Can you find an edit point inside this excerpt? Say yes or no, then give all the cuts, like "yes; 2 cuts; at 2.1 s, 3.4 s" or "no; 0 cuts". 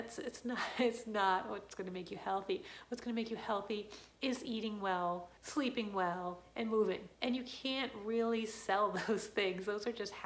yes; 3 cuts; at 4.1 s, 5.4 s, 7.1 s